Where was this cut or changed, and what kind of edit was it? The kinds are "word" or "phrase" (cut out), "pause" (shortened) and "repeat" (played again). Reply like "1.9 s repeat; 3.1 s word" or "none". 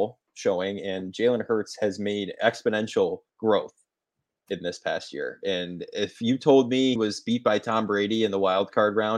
3.3 s pause; 7.0 s word